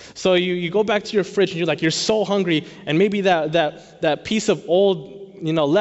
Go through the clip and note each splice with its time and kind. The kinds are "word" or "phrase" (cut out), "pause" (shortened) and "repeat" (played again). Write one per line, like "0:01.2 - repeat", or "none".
none